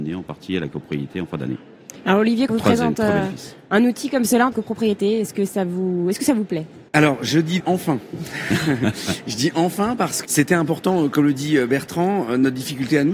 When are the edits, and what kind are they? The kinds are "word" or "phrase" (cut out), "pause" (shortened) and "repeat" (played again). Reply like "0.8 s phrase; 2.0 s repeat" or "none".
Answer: 2.5 s word; 4.5 s phrase; 6.9 s pause; 7.6 s word; 10.2 s word